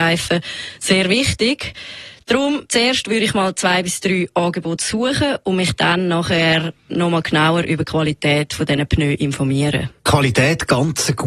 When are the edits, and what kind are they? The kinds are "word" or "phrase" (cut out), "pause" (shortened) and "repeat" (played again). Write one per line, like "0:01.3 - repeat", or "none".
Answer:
0:02.7 - pause
0:10.0 - pause